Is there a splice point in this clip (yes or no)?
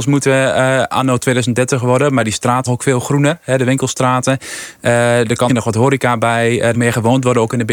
yes